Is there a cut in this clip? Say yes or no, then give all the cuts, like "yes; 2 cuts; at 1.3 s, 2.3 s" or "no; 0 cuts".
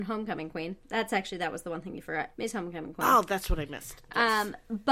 yes; 1 cut; at 2.3 s